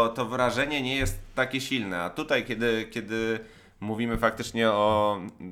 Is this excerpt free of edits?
yes; 0 cuts

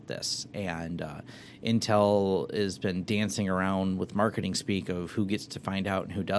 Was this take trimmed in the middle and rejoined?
no; 0 cuts

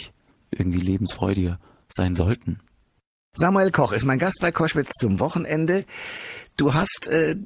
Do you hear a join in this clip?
no; 0 cuts

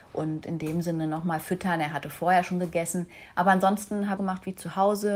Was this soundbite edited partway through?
yes; 1 cut; at 4.2 s

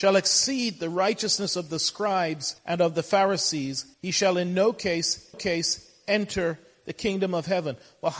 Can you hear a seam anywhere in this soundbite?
yes; 3 cuts; at 2.6 s, 3.9 s, 5.3 s

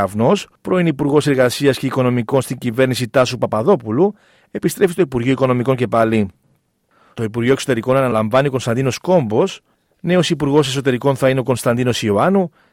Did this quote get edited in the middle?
no; 0 cuts

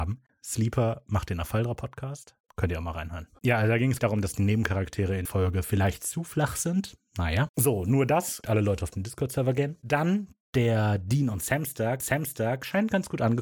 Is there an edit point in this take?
yes; 5 cuts; at 2.4 s, 4.0 s, 5.3 s, 8.4 s, 12.0 s

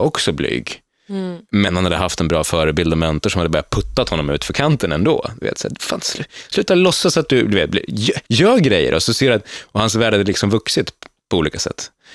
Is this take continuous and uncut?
no; 1 cut; at 8.2 s

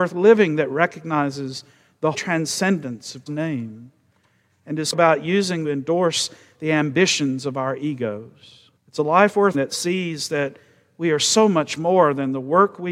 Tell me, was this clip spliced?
yes; 6 cuts; at 2.1 s, 3.3 s, 4.9 s, 5.6 s, 8.8 s, 9.5 s

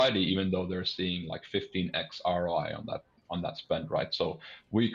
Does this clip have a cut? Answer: no; 0 cuts

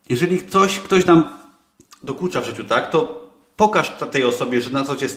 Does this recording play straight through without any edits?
yes; 0 cuts

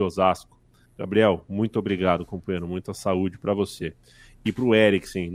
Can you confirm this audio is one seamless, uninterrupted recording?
yes; 0 cuts

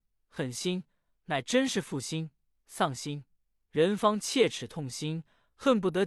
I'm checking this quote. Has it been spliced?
no; 0 cuts

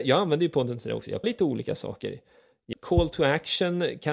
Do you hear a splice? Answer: yes; 2 cuts; at 1.2 s, 2.7 s

